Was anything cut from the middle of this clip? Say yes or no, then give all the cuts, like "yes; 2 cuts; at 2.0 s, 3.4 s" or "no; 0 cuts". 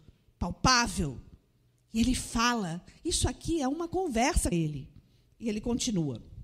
yes; 1 cut; at 4.5 s